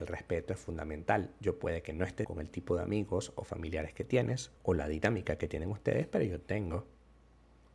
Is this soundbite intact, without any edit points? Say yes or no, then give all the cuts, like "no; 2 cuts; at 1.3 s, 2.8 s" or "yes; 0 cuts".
no; 2 cuts; at 2.2 s, 4.6 s